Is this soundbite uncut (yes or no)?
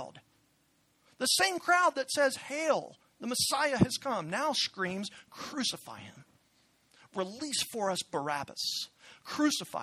yes